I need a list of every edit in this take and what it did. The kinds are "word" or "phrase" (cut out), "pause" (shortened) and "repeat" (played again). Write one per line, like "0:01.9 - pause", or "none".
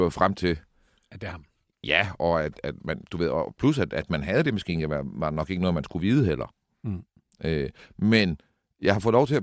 none